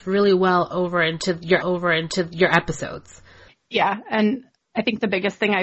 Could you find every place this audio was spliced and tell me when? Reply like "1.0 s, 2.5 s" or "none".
1.6 s